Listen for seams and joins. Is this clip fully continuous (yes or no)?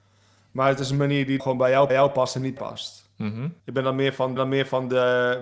no